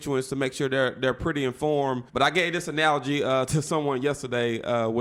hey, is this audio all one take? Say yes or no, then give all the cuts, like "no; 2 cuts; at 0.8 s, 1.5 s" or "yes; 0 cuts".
no; 1 cut; at 2.1 s